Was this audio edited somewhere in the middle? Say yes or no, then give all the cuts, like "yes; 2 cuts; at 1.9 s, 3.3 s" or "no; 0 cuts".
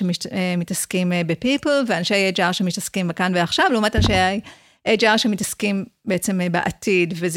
no; 0 cuts